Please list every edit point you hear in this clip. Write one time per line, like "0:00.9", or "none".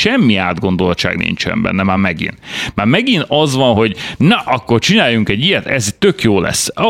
none